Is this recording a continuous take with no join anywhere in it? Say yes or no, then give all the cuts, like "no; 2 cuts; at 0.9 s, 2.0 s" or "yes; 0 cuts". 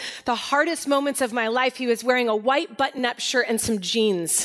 yes; 0 cuts